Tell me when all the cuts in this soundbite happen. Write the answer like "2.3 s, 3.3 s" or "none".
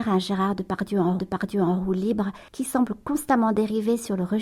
1.2 s, 2.5 s